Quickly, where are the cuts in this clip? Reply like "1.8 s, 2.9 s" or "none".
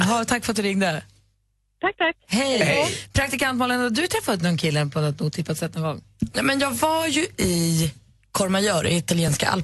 none

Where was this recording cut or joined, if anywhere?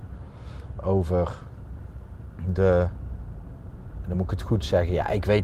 none

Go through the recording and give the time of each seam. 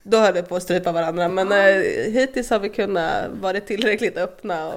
none

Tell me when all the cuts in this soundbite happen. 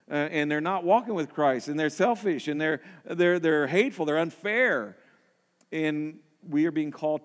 none

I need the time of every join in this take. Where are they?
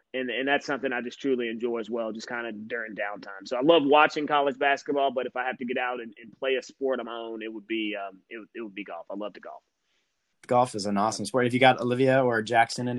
none

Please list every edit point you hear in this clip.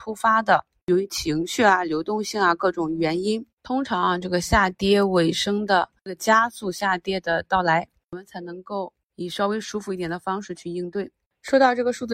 none

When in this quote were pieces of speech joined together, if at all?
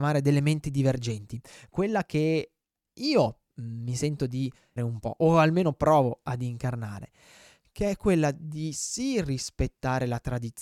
2.8 s, 4.8 s

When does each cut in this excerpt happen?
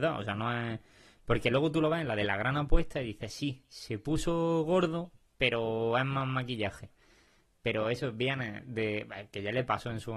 none

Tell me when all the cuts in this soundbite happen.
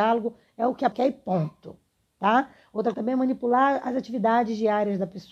0.9 s, 2.9 s

